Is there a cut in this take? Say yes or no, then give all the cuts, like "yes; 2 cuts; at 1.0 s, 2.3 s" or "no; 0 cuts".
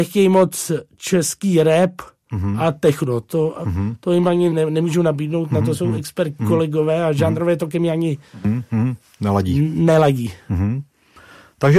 yes; 1 cut; at 6.4 s